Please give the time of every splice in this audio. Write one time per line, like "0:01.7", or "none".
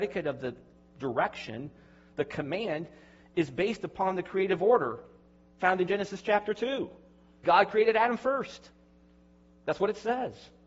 0:07.4